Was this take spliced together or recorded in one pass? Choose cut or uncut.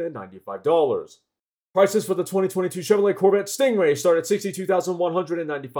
uncut